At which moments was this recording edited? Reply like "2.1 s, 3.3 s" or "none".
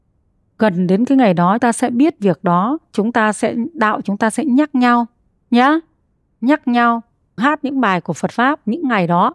1.6 s, 4.0 s, 7.4 s